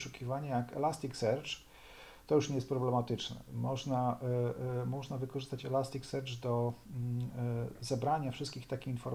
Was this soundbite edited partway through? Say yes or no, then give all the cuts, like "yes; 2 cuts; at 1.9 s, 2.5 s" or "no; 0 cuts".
no; 0 cuts